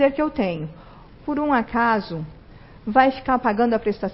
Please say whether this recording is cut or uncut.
cut